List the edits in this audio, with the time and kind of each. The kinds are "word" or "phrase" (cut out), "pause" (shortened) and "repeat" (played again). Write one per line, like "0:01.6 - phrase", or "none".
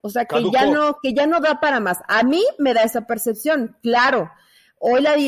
none